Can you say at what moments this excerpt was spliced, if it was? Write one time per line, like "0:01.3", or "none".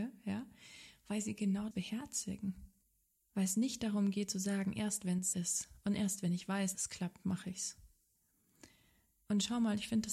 0:01.7
0:02.8
0:05.3
0:06.7